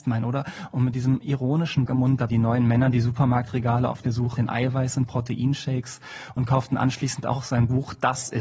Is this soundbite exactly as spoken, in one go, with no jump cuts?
no; 3 cuts; at 1.9 s, 2.3 s, 4.4 s

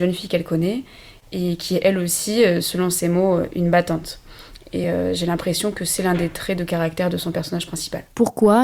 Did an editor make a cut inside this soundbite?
no; 0 cuts

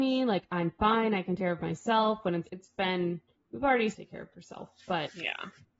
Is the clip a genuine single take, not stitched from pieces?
no; 4 cuts; at 1.4 s, 2.4 s, 3.3 s, 3.9 s

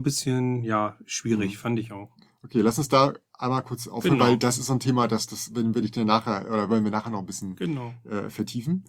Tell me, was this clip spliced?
no; 0 cuts

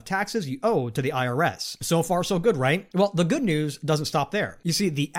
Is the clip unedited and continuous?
yes; 0 cuts

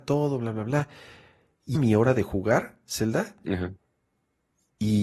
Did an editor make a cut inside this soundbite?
yes; 1 cut; at 1.7 s

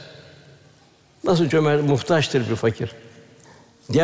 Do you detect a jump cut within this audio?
no; 0 cuts

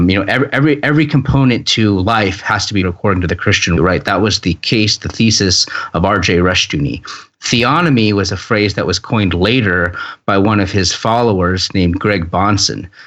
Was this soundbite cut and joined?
yes; 2 cuts; at 2.8 s, 3.8 s

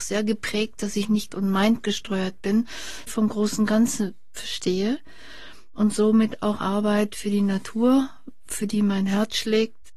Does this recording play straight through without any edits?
no; 3 cuts; at 1.3 s, 3.1 s, 6.6 s

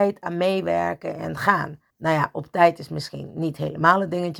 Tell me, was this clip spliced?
yes; 1 cut; at 1.9 s

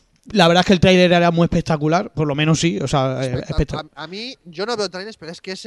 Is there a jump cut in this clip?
no; 0 cuts

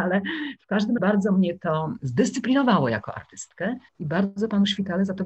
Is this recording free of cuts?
no; 2 cuts; at 1.0 s, 3.9 s

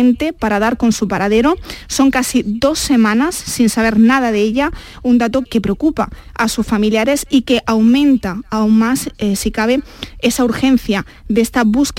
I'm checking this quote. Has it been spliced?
yes; 1 cut; at 5.4 s

